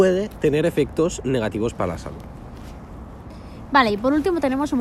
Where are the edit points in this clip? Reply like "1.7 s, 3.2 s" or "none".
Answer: none